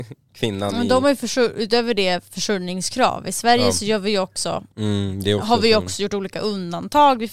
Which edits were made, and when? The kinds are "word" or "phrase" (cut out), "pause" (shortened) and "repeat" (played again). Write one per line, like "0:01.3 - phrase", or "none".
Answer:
0:04.7 - pause